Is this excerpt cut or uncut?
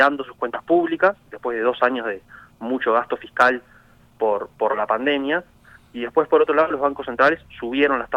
uncut